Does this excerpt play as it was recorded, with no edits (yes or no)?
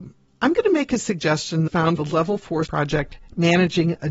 no